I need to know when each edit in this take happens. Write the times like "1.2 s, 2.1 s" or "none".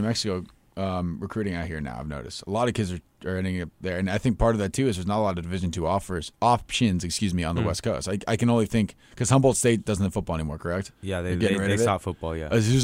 10.9 s

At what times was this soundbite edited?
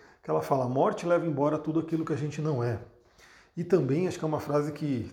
none

